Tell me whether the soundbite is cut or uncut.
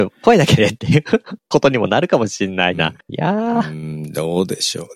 cut